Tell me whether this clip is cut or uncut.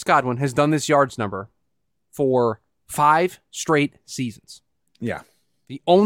uncut